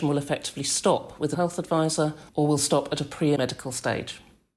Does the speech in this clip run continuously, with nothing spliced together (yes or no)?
no